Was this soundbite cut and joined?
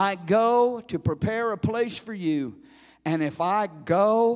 no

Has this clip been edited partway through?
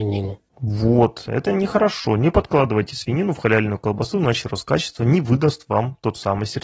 no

